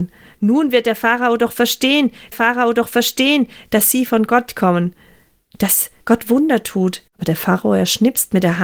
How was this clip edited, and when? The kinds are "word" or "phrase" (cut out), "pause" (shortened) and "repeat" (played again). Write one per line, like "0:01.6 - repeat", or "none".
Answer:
0:02.3 - repeat
0:06.0 - pause
0:07.1 - pause